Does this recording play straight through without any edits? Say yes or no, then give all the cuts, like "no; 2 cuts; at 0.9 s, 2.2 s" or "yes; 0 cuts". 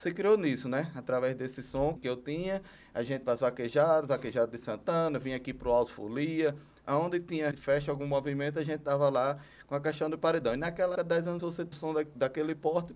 no; 6 cuts; at 2.0 s, 3.2 s, 7.5 s, 11.0 s, 11.4 s, 11.7 s